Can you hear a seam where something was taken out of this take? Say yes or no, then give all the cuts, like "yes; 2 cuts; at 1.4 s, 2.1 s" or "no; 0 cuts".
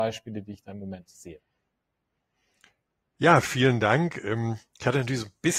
no; 0 cuts